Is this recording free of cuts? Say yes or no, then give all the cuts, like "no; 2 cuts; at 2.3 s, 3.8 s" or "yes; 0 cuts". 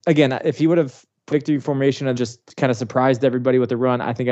no; 2 cuts; at 1.3 s, 2.2 s